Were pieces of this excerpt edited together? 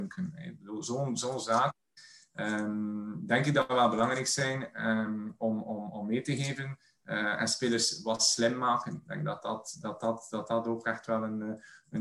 no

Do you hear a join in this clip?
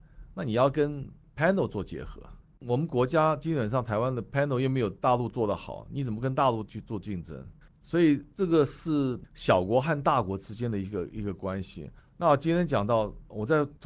no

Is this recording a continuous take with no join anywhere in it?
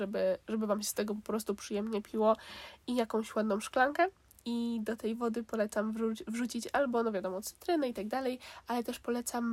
yes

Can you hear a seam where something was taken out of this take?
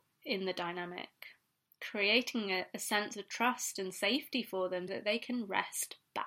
yes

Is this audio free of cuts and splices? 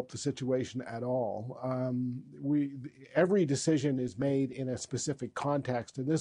yes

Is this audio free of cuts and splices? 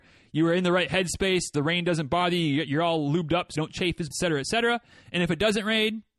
no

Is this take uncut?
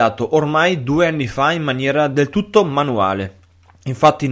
yes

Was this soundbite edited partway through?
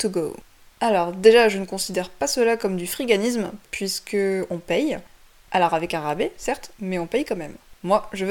no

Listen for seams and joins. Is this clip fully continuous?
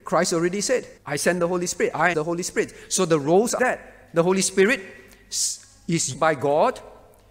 no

